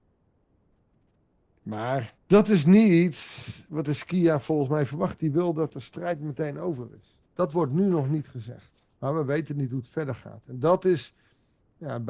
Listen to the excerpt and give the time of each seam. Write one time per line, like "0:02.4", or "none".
0:02.2
0:07.3
0:08.9